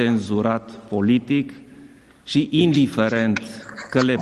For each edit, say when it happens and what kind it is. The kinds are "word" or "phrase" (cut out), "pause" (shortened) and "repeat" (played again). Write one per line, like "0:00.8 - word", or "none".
none